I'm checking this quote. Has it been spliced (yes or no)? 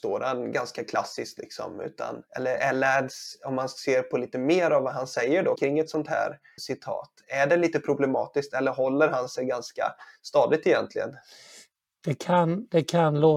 yes